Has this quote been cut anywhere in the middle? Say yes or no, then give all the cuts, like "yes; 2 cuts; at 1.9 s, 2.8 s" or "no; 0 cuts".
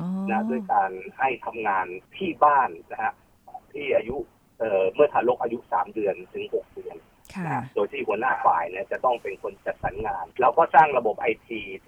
yes; 2 cuts; at 2.1 s, 10.3 s